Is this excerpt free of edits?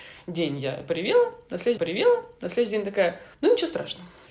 no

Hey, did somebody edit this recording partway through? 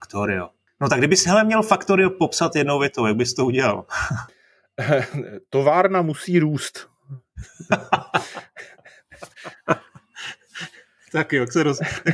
no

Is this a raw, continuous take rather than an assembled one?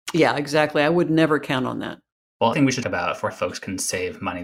no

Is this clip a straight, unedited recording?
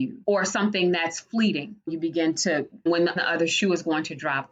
no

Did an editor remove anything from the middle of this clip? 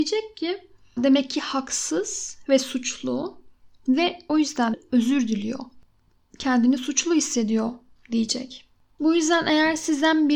yes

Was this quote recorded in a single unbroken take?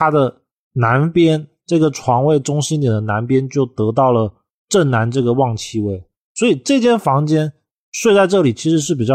yes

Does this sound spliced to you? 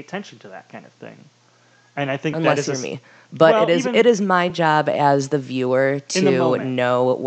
no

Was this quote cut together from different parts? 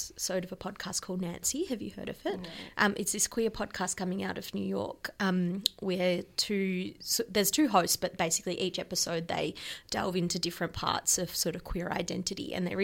no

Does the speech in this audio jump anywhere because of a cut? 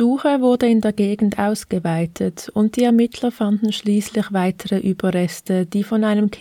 no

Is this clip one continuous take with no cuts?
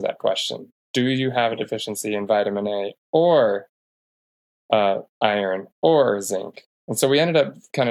yes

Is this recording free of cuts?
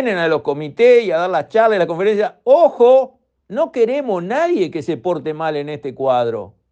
no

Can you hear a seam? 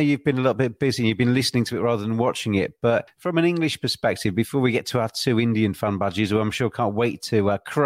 no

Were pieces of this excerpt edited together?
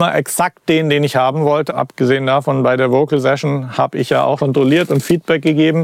yes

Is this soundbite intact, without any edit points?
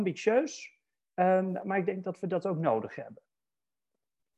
yes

